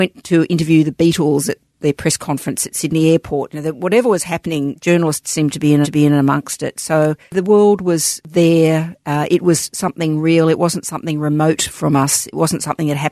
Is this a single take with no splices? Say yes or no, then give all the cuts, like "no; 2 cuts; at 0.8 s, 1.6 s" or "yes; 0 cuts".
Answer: no; 1 cut; at 5.8 s